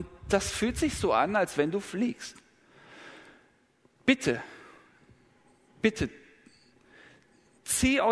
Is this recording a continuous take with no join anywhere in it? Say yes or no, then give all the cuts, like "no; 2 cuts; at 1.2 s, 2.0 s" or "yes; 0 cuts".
yes; 0 cuts